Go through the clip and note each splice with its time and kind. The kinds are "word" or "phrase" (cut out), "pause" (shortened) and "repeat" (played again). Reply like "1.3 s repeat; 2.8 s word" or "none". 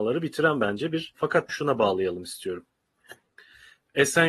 1.1 s word; 1.5 s word

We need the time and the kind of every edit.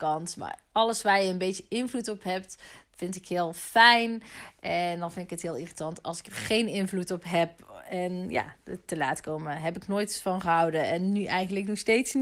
none

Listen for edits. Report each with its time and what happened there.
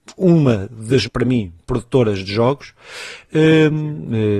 1.0 s word

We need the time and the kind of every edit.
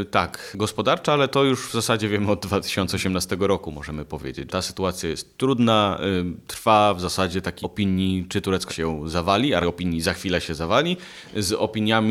4.5 s word; 7.6 s word; 8.7 s word; 9.6 s word

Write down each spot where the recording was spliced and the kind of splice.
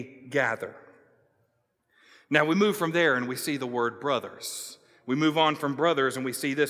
none

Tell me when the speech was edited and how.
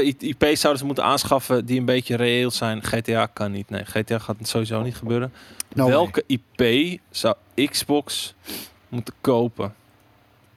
9.2 s pause

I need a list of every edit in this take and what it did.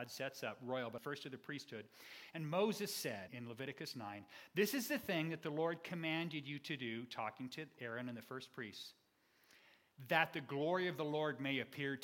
1.0 s phrase; 3.3 s word

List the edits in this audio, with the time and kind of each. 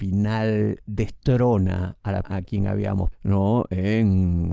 2.2 s word; 3.1 s word

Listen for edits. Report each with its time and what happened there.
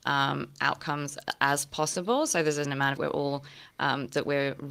2.6 s word; 3.0 s phrase

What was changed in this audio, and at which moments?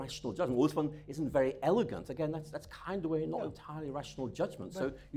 none

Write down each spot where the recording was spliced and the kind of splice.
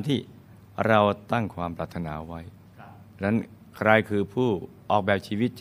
3.1 s pause

